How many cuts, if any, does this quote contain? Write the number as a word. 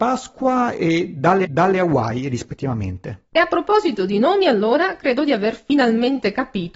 two